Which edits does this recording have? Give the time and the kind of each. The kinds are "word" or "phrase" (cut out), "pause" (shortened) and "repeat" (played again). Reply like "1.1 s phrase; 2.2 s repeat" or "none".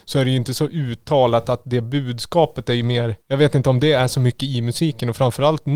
3.2 s pause